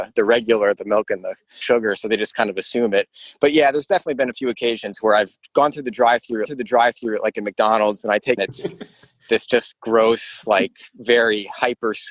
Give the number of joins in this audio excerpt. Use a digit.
3